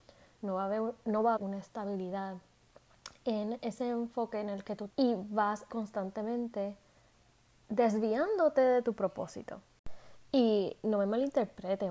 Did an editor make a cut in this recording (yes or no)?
yes